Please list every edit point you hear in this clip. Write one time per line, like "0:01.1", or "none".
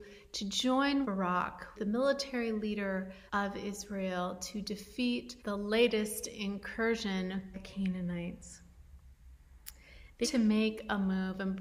0:01.0
0:01.7
0:03.3
0:05.4
0:07.5
0:10.2